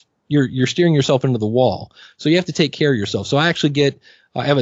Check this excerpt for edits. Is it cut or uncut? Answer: uncut